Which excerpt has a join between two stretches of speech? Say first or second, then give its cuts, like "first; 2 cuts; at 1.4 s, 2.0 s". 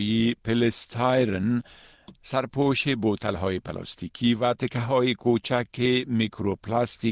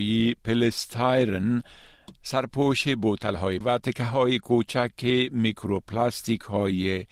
second; 1 cut; at 3.6 s